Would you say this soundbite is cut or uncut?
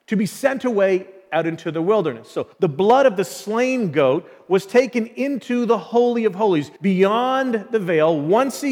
cut